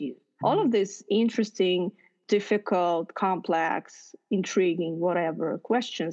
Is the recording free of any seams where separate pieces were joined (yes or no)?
yes